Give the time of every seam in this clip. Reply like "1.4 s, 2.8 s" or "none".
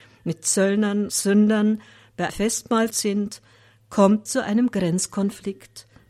1.1 s, 2.3 s, 2.9 s, 4.3 s